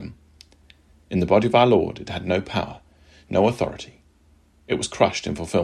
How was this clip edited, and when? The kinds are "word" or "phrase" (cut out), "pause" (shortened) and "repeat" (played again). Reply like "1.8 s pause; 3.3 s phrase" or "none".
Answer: none